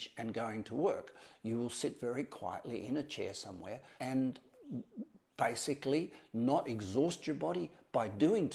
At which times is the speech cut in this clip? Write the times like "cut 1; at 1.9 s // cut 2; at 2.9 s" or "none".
cut 1; at 4.0 s

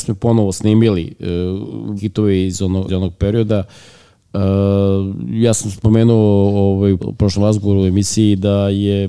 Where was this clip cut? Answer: cut 1; at 2.0 s // cut 2; at 2.9 s // cut 3; at 7.0 s // cut 4; at 7.4 s

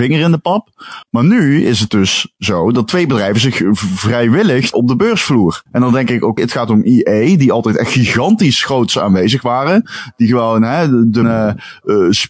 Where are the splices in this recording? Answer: cut 1; at 1.0 s // cut 2; at 4.7 s // cut 3; at 5.7 s // cut 4; at 6.4 s // cut 5; at 11.2 s

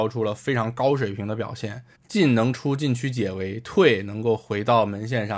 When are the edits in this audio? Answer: cut 1; at 1.9 s

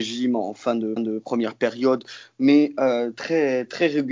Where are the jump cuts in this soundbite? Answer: cut 1; at 1.0 s

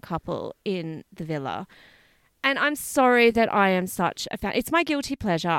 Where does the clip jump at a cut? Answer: none

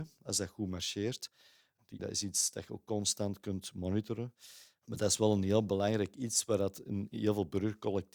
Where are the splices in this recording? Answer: cut 1; at 2.0 s

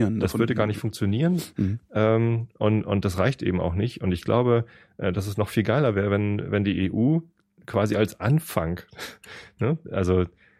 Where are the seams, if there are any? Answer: none

